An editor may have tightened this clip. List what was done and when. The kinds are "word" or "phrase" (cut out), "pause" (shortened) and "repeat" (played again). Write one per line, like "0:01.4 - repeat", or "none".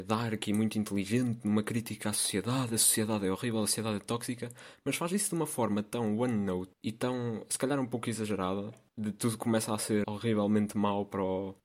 0:10.0 - word